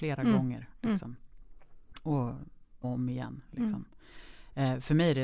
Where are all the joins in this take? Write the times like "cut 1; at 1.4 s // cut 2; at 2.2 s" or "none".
cut 1; at 2.8 s